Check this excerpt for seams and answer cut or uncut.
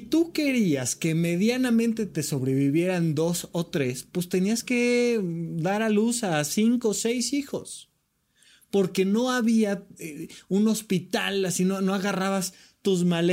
uncut